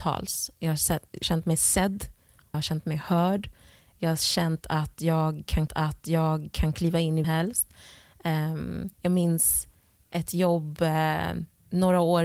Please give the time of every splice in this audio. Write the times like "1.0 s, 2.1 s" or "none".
1.2 s, 2.5 s, 5.7 s, 7.2 s, 8.9 s